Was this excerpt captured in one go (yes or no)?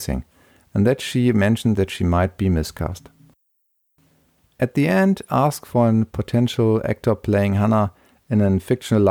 yes